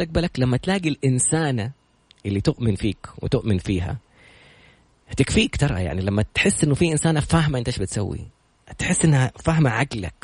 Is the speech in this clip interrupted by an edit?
no; 0 cuts

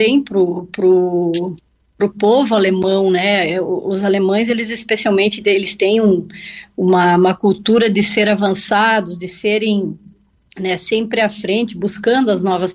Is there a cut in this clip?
no; 0 cuts

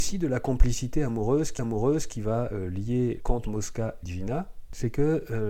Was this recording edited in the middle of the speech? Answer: yes; 3 cuts; at 1.6 s, 3.2 s, 4.0 s

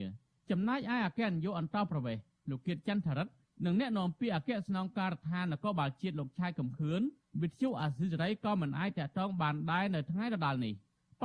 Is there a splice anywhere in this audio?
no; 0 cuts

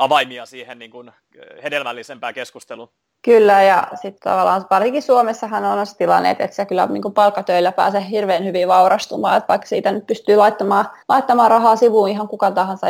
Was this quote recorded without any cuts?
no; 3 cuts; at 3.0 s, 4.2 s, 11.0 s

